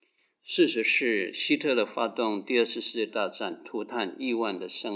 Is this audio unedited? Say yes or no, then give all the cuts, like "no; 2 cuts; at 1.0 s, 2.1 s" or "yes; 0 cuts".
yes; 0 cuts